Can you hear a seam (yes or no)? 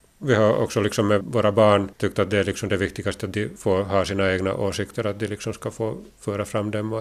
no